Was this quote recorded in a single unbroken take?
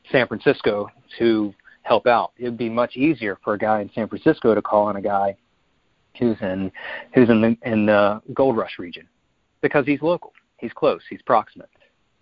yes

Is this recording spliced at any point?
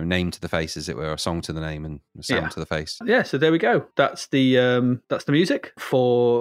yes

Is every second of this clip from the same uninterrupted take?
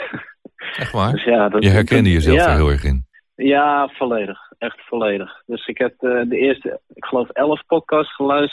yes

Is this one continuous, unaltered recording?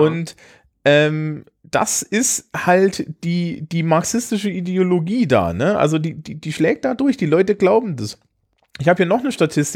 yes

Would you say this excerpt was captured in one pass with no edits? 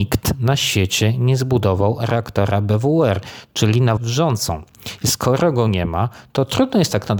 no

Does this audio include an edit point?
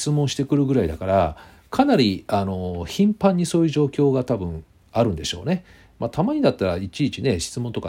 no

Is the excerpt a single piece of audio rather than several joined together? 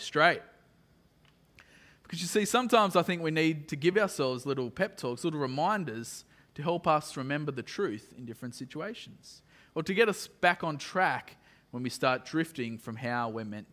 yes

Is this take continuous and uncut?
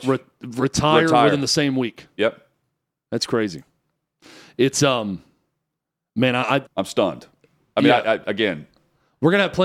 no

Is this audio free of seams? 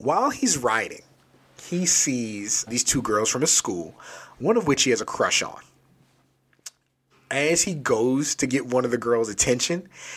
no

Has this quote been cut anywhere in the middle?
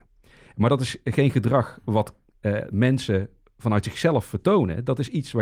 no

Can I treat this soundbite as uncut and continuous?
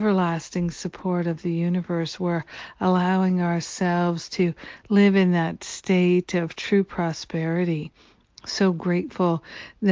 yes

